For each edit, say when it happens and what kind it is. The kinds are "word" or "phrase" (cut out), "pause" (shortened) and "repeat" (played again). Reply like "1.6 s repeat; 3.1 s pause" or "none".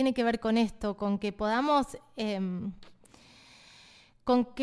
none